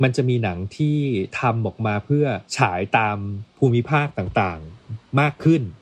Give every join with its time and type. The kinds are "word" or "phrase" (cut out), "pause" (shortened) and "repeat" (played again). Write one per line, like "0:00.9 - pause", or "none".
0:02.5 - pause